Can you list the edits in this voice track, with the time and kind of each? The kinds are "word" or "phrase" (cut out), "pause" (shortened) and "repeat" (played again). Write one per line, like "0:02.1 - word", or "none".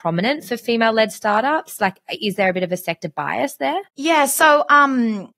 0:03.9 - pause